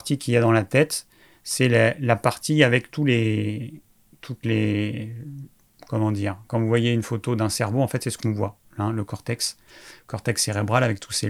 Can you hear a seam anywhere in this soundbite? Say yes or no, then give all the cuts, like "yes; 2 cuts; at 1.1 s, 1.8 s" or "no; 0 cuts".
no; 0 cuts